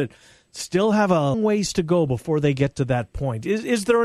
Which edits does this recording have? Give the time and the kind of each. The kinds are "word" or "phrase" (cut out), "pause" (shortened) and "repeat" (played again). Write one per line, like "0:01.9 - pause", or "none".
0:01.3 - word